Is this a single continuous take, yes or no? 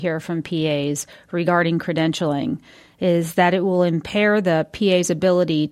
yes